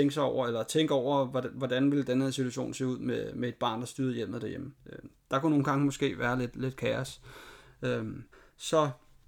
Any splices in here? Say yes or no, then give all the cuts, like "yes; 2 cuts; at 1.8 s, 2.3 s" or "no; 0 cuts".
yes; 2 cuts; at 4.8 s, 8.3 s